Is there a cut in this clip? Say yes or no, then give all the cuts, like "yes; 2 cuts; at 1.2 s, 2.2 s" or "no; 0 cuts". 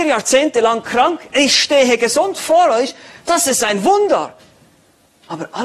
no; 0 cuts